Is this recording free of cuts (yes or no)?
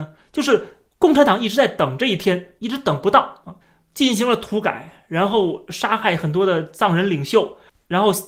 no